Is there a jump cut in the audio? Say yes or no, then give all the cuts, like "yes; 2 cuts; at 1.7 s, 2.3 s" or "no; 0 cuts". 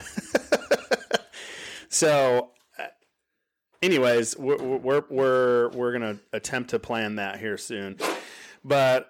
no; 0 cuts